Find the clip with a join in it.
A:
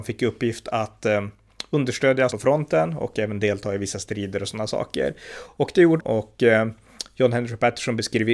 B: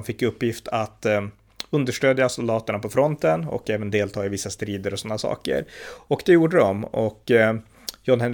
A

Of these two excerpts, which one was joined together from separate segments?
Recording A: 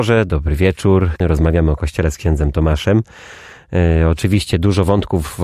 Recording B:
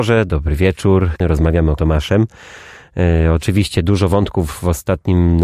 B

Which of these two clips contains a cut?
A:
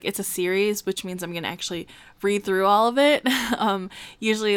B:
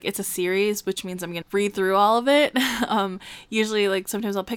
B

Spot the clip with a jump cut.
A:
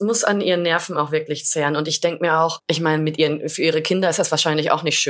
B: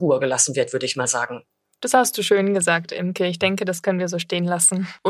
A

